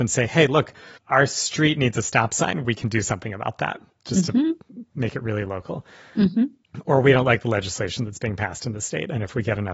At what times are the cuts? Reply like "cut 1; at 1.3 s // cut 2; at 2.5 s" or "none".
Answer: none